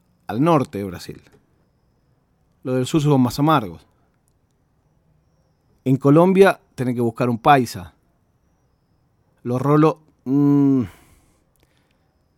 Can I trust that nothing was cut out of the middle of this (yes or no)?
yes